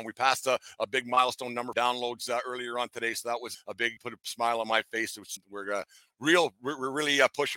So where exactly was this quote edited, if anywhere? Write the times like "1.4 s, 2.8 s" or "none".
1.7 s, 3.5 s, 4.0 s, 5.4 s